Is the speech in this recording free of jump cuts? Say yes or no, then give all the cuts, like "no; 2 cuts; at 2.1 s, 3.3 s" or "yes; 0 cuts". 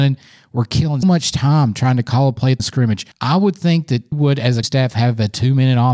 no; 5 cuts; at 1.0 s, 2.6 s, 3.1 s, 4.1 s, 4.6 s